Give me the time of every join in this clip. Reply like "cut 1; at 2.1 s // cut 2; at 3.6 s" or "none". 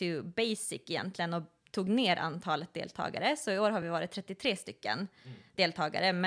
none